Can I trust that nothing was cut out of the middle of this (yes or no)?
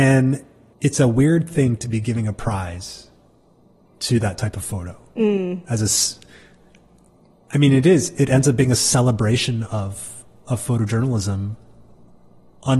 yes